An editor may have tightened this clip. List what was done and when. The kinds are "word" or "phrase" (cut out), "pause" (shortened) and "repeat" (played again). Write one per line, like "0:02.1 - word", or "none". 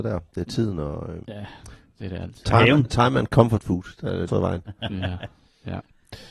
0:01.2 - word
0:04.3 - word